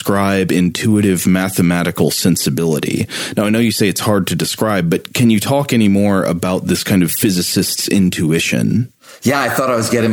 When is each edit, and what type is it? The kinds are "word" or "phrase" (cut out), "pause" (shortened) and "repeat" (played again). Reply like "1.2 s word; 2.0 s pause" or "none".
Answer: none

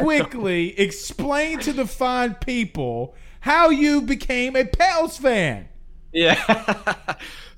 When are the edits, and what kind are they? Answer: none

